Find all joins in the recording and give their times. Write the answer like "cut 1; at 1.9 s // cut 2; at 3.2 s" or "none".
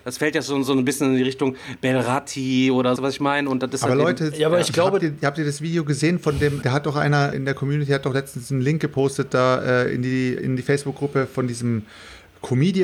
cut 1; at 3.0 s // cut 2; at 6.6 s // cut 3; at 7.3 s // cut 4; at 10.4 s

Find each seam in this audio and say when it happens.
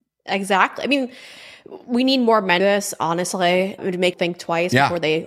cut 1; at 2.6 s // cut 2; at 3.8 s // cut 3; at 4.1 s

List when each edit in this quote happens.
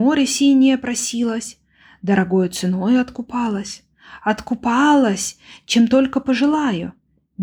none

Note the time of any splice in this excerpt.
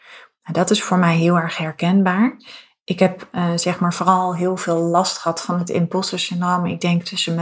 none

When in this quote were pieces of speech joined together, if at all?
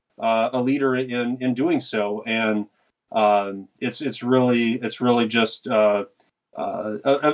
none

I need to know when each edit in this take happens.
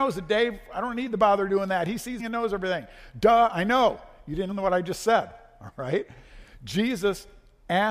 cut 1; at 2.2 s // cut 2; at 4.5 s

